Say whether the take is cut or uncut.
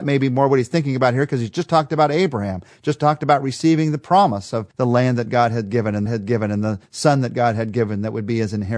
cut